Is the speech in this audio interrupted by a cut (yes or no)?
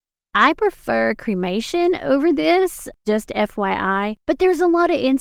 yes